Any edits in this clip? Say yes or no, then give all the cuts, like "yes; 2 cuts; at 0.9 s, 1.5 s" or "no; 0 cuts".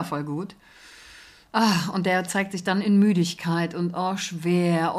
no; 0 cuts